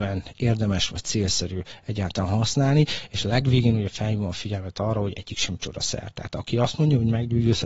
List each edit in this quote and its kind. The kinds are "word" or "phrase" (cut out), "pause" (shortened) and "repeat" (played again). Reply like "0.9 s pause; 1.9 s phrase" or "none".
none